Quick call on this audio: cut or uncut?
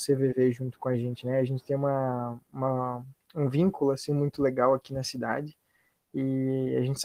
uncut